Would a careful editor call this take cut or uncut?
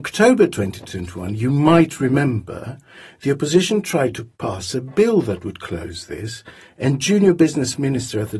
uncut